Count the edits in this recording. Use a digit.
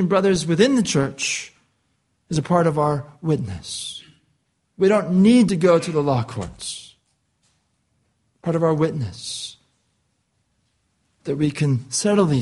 0